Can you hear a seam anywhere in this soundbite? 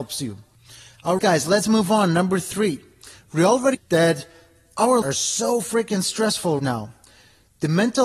yes; 4 cuts; at 1.2 s, 3.7 s, 5.0 s, 6.6 s

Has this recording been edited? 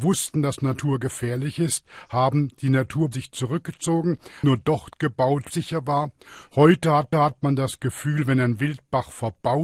yes; 4 cuts; at 3.1 s, 4.4 s, 5.5 s, 7.1 s

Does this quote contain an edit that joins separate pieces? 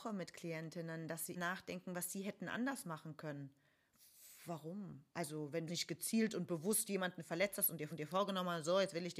yes; 4 cuts; at 1.3 s, 5.1 s, 5.7 s, 7.9 s

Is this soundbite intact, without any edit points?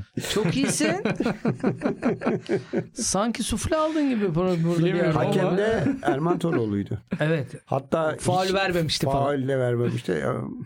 yes; 0 cuts

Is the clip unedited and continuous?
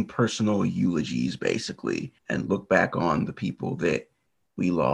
no; 1 cut; at 2.2 s

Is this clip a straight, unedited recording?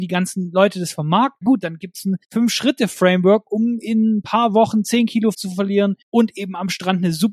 no; 4 cuts; at 1.4 s, 2.2 s, 5.3 s, 6.0 s

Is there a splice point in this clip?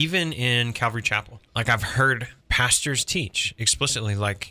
yes; 2 cuts; at 1.5 s, 2.4 s

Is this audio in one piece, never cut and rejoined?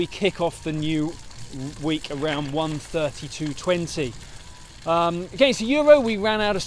yes; 0 cuts

